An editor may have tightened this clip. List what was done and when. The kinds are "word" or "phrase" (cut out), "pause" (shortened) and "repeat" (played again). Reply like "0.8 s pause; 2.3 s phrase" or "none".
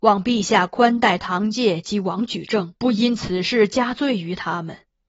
2.8 s pause